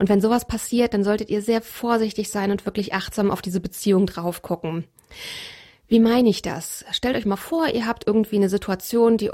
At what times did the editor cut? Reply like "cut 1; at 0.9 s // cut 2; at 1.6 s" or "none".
none